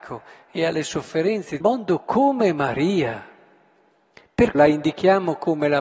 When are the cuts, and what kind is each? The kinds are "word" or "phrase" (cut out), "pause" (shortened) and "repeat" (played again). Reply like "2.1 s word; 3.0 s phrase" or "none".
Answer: 1.6 s phrase; 4.5 s word